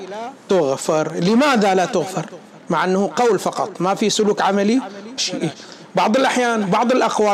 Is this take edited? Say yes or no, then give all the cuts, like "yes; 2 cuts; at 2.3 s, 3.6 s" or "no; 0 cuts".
yes; 2 cuts; at 2.6 s, 5.2 s